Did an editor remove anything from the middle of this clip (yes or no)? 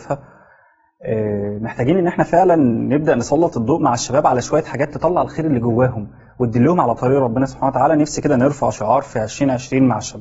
no